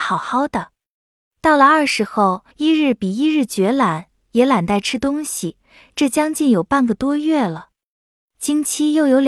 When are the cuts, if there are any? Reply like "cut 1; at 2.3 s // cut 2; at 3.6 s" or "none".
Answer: cut 1; at 2.5 s